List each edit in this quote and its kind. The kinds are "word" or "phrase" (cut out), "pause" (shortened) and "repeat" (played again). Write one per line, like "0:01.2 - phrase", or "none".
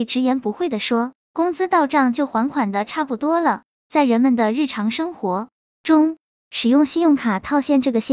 none